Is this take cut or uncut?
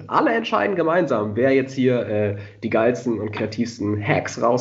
uncut